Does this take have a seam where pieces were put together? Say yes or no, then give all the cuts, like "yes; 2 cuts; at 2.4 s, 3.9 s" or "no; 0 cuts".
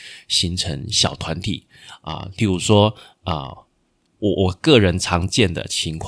no; 0 cuts